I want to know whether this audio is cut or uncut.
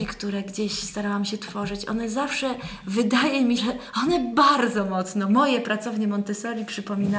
cut